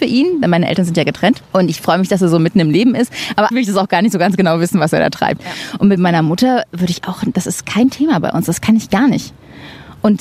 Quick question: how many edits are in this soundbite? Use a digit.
2